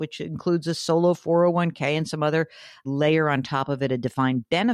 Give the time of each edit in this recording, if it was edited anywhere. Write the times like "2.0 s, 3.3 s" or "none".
2.8 s